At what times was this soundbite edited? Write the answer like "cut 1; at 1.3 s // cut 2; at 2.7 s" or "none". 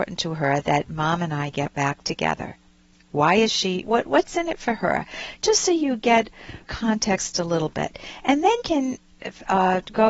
cut 1; at 3.8 s // cut 2; at 6.6 s // cut 3; at 8.6 s

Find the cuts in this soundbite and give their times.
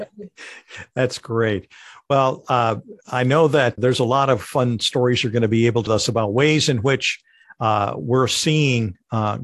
cut 1; at 3.8 s // cut 2; at 5.9 s

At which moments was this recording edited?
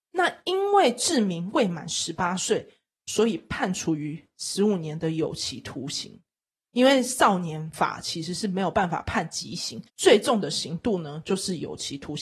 cut 1; at 9.9 s

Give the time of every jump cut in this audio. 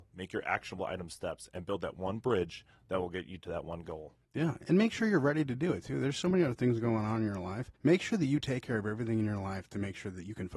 cut 1; at 4.2 s // cut 2; at 7.7 s

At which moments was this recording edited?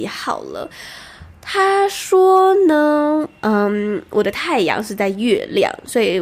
none

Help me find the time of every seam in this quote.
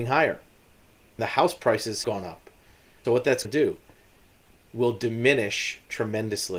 cut 1; at 1.2 s // cut 2; at 2.0 s // cut 3; at 3.0 s // cut 4; at 3.4 s // cut 5; at 4.7 s

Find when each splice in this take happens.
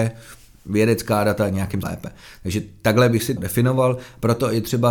cut 1; at 1.8 s // cut 2; at 3.4 s

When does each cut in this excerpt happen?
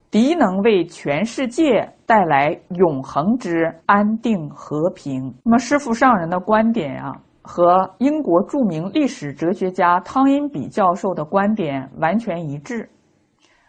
cut 1; at 3.8 s // cut 2; at 5.4 s

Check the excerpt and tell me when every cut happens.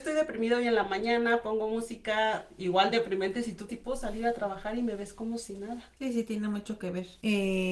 cut 1; at 3.7 s

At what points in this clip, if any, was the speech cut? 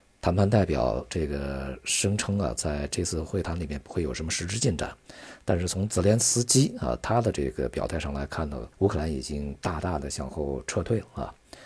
cut 1; at 8.7 s

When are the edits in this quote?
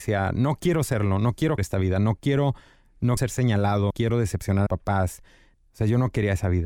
cut 1; at 1.6 s // cut 2; at 3.2 s // cut 3; at 3.9 s // cut 4; at 4.7 s

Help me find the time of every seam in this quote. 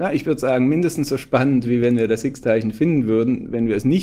none

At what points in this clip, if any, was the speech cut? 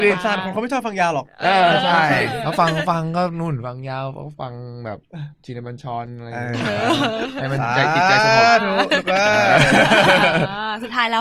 cut 1; at 5.3 s

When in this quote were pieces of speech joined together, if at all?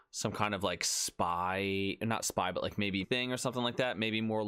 cut 1; at 3.0 s

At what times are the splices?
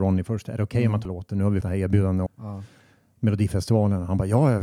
cut 1; at 1.1 s // cut 2; at 1.6 s // cut 3; at 2.3 s

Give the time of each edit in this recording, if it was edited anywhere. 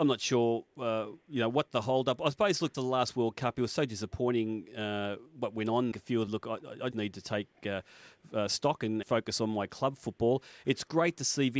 cut 1; at 2.7 s // cut 2; at 5.9 s // cut 3; at 6.3 s // cut 4; at 6.9 s // cut 5; at 9.0 s

